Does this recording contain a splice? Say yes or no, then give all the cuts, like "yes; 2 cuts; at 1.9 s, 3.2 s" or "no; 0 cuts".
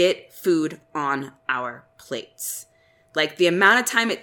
no; 0 cuts